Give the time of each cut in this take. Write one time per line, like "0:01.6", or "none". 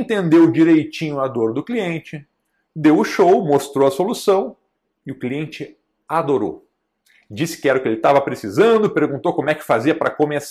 none